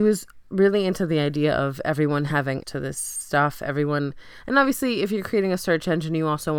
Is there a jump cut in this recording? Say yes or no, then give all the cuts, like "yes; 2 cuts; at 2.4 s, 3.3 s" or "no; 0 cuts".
yes; 1 cut; at 2.6 s